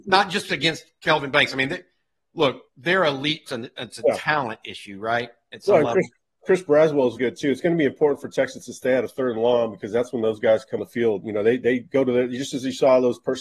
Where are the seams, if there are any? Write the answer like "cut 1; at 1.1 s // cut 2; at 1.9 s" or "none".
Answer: cut 1; at 2.7 s // cut 2; at 3.5 s // cut 3; at 7.2 s // cut 4; at 10.8 s